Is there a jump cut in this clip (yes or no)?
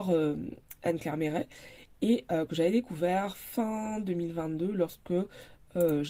no